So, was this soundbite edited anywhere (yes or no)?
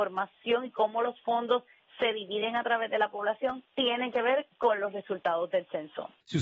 no